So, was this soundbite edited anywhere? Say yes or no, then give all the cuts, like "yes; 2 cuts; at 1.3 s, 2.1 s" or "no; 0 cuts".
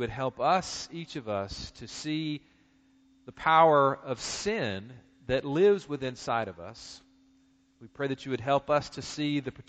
no; 0 cuts